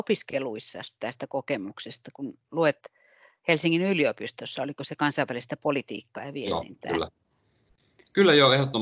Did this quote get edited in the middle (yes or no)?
no